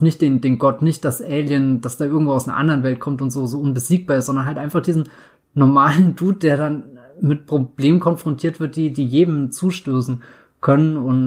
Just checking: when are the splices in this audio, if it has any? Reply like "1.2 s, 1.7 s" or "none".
none